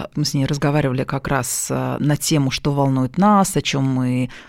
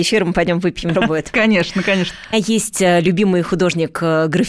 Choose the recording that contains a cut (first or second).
second